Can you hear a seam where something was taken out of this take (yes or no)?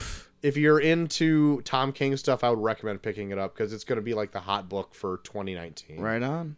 no